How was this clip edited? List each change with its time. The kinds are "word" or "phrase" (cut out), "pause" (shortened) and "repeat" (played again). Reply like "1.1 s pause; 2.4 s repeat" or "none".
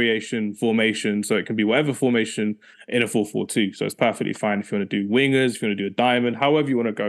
none